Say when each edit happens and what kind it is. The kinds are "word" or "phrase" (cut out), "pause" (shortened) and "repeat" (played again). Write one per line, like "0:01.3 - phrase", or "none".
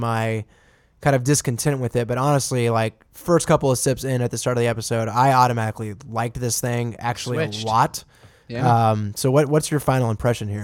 none